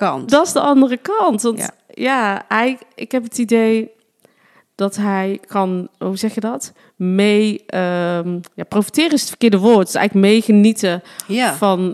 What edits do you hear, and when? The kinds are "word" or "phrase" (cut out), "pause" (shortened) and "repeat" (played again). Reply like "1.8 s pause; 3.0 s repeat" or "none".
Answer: none

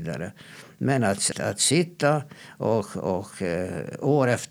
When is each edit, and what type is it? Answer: 1.3 s word

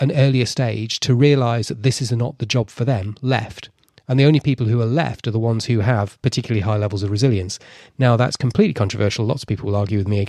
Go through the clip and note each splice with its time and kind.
none

